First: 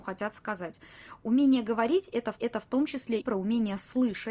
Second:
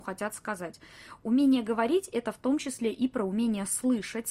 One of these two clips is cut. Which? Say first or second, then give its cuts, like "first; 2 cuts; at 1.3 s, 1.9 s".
first; 2 cuts; at 2.4 s, 3.2 s